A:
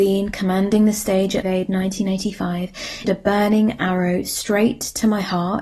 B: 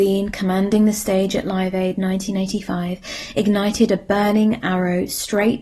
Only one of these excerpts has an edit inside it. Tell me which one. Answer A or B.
A